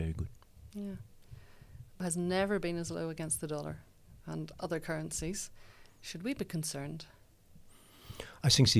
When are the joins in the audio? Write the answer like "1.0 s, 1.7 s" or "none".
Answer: 2.0 s